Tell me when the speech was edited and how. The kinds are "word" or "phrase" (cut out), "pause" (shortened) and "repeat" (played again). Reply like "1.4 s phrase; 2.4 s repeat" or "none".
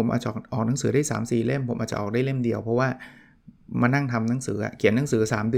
none